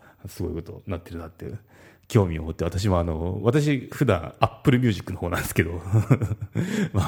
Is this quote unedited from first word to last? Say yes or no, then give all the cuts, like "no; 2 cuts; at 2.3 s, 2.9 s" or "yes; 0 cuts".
yes; 0 cuts